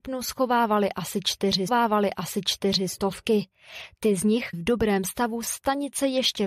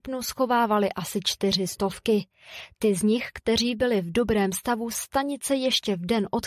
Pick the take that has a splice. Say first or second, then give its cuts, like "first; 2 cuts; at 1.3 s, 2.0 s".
first; 2 cuts; at 1.7 s, 4.5 s